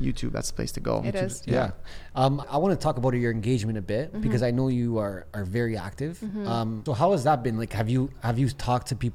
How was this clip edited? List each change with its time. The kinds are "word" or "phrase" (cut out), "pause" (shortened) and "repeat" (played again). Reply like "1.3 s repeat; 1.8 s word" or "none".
2.4 s word; 6.9 s word